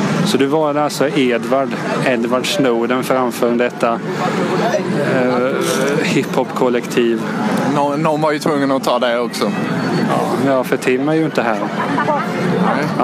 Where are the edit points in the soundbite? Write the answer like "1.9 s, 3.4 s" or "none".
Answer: none